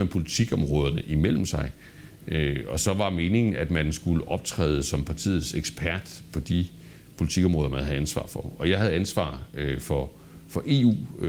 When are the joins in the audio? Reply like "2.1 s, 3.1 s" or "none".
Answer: none